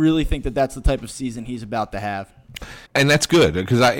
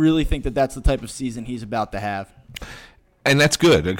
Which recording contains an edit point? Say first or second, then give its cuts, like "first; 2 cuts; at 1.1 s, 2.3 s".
first; 1 cut; at 2.9 s